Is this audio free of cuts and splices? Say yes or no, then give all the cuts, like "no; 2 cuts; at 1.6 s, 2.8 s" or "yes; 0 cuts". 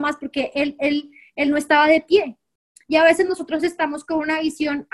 yes; 0 cuts